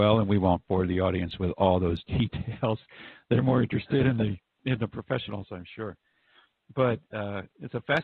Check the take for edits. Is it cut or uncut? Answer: uncut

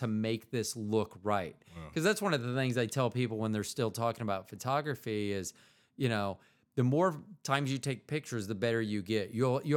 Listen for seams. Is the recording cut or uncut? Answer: uncut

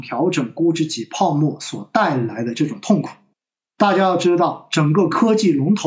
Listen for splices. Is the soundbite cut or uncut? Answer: cut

